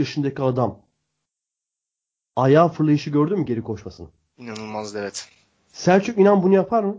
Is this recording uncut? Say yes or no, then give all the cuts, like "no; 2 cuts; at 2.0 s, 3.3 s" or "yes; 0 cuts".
yes; 0 cuts